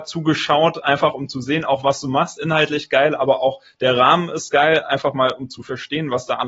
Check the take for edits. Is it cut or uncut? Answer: uncut